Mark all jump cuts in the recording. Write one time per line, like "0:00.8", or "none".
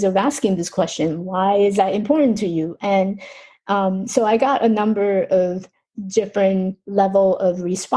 none